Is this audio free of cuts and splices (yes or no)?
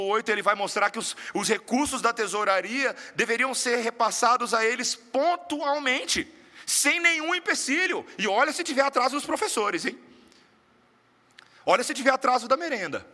yes